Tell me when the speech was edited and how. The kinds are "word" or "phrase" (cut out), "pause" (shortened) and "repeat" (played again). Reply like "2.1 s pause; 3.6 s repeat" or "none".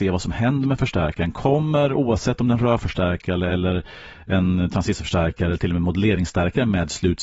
none